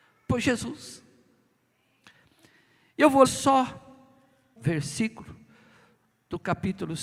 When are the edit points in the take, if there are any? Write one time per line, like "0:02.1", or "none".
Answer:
0:03.2
0:04.6